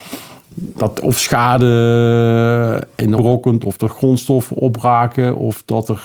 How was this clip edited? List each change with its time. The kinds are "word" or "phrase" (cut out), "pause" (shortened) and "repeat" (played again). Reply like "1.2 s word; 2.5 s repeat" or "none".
3.2 s word